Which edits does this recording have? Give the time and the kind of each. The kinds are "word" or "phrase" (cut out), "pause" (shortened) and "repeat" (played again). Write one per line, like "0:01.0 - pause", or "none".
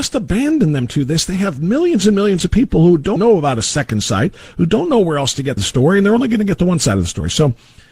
0:03.2 - word
0:05.6 - phrase